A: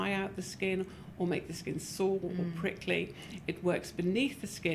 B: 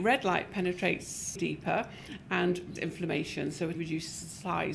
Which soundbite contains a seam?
B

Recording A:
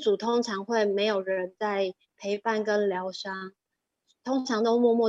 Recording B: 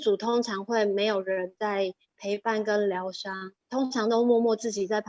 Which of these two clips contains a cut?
B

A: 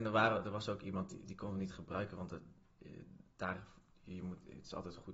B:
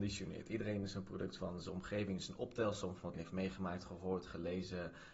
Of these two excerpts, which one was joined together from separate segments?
B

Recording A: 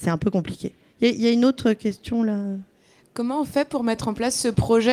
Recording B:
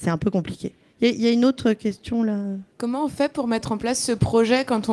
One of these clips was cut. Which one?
B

